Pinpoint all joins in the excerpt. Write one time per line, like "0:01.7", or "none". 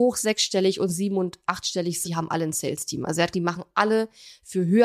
0:02.0
0:03.3